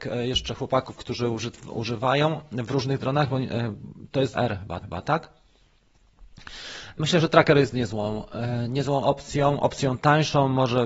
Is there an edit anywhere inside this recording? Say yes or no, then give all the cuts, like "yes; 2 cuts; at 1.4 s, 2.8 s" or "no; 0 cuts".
yes; 2 cuts; at 4.3 s, 4.8 s